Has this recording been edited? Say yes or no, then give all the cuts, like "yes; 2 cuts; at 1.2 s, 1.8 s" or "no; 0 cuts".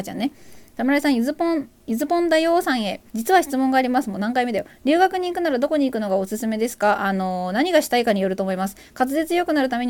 yes; 1 cut; at 3.1 s